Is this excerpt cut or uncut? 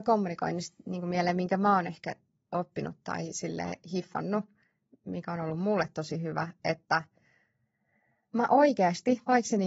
uncut